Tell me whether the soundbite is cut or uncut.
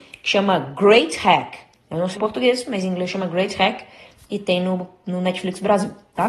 cut